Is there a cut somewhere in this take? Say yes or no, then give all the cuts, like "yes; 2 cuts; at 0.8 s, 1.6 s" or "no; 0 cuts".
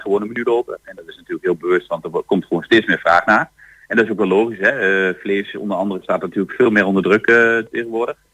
no; 0 cuts